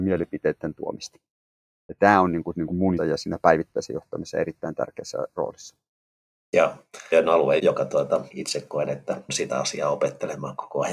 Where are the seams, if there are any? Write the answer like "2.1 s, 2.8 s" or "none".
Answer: 3.0 s, 7.1 s, 7.6 s, 8.3 s, 9.3 s